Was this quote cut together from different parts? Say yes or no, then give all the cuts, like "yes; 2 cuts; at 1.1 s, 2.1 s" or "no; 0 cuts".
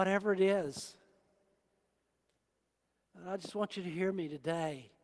no; 0 cuts